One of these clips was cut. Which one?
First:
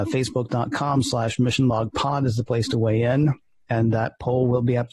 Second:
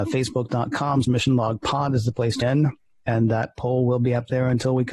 second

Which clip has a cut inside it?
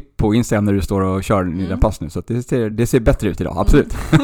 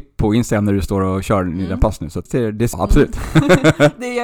second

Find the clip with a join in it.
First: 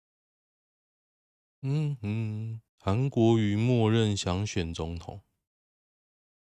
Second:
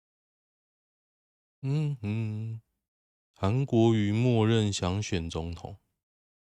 first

